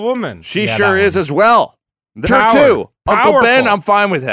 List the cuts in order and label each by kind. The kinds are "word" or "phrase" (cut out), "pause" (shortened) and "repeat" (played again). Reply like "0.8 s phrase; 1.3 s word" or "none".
2.2 s word